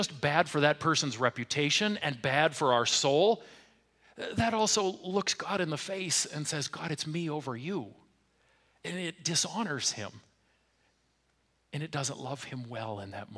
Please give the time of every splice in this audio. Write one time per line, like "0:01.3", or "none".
none

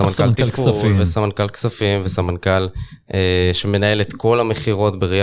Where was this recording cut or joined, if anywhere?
none

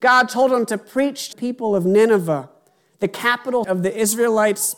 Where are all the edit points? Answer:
0:01.3
0:03.6

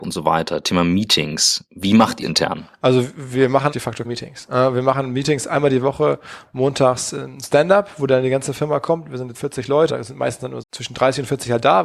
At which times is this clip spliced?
0:02.2
0:03.7
0:04.0
0:09.3
0:09.9
0:10.6

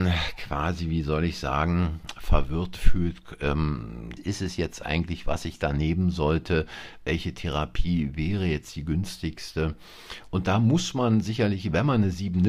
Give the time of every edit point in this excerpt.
0:04.2

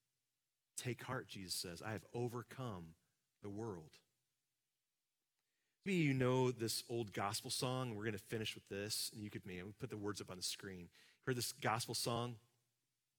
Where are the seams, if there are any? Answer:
0:05.9
0:09.4

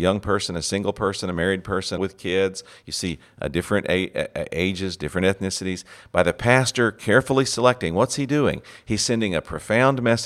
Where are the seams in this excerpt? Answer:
0:02.0

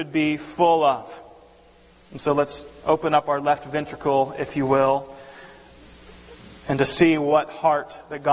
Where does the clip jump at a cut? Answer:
none

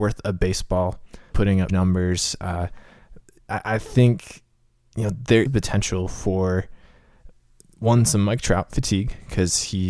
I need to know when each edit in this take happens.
0:01.3
0:01.7
0:05.5

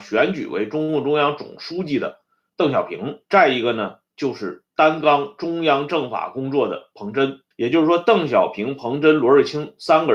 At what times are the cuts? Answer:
0:03.2
0:04.7
0:07.5

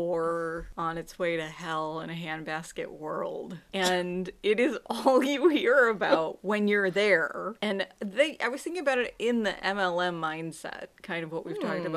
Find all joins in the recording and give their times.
0:07.6

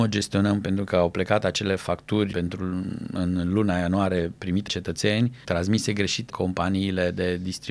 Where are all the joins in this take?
0:02.3
0:04.7
0:05.4
0:06.3

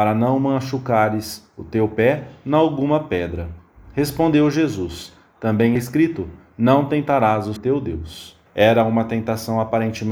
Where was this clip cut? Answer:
0:05.8
0:07.6
0:08.5

